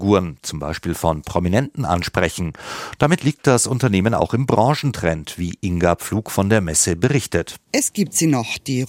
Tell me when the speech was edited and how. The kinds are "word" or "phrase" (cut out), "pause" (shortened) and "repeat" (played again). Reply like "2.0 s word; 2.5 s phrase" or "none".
7.6 s pause